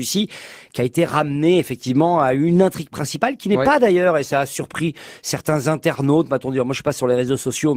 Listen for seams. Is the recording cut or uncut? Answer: uncut